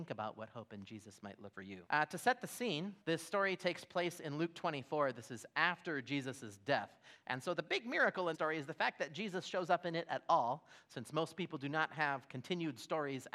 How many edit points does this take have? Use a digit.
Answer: 4